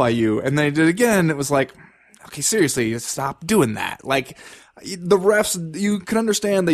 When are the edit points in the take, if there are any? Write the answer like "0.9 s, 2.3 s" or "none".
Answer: none